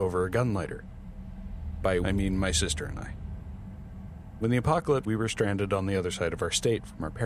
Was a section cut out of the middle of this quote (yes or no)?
yes